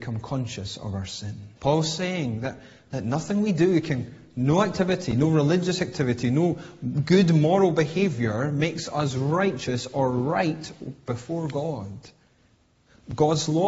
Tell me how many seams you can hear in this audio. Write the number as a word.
one